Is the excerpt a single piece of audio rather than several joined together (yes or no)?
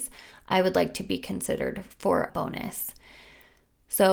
no